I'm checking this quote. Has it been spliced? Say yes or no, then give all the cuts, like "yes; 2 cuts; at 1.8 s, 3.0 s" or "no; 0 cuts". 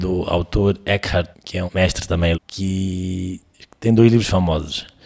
yes; 3 cuts; at 1.3 s, 1.7 s, 2.3 s